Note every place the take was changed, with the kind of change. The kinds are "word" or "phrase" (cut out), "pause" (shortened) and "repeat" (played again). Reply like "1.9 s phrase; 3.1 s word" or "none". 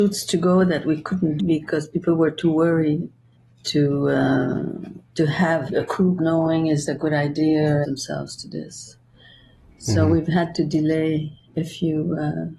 1.4 s word; 3.3 s pause; 5.0 s pause; 5.7 s word; 6.2 s phrase; 6.9 s word; 7.8 s phrase